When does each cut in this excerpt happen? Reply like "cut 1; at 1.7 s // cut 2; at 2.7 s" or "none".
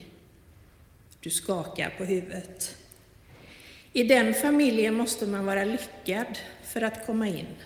none